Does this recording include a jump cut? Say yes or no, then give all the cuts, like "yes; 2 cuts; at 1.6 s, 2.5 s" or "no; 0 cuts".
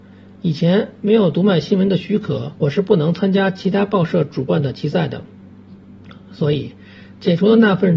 yes; 1 cut; at 2.6 s